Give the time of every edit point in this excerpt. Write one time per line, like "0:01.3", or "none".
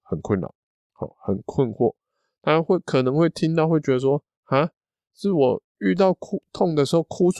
none